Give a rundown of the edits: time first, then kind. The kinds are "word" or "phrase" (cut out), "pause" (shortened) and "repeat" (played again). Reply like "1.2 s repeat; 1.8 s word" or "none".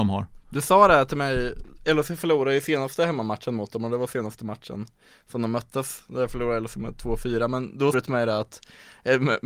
7.9 s word